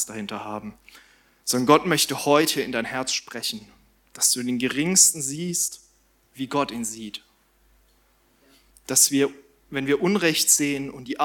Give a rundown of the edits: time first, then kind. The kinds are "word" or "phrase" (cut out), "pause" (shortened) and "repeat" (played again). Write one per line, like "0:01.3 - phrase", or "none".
none